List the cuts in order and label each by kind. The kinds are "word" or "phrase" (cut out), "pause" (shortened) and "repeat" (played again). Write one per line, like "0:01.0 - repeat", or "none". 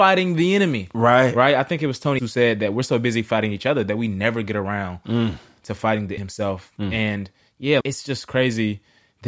0:02.2 - word
0:06.2 - word
0:07.8 - word